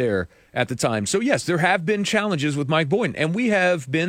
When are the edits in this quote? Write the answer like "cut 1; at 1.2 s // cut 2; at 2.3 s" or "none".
none